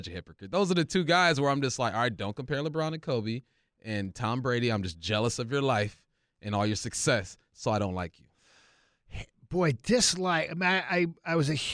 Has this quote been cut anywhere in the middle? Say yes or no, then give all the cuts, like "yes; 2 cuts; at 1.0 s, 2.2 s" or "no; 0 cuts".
no; 0 cuts